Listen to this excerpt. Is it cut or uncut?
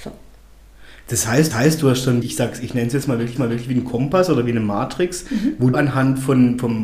cut